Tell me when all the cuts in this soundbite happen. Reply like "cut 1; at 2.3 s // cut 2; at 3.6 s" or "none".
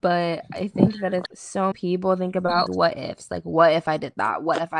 cut 1; at 1.3 s // cut 2; at 1.7 s // cut 3; at 2.7 s